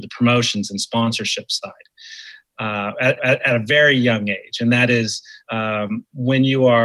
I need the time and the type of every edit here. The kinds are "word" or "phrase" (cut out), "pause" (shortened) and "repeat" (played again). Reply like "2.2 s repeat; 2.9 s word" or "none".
3.2 s repeat; 5.4 s pause